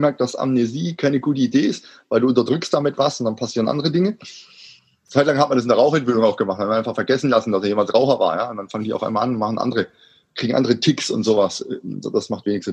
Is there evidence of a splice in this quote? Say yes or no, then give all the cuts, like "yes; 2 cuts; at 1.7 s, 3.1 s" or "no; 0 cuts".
no; 0 cuts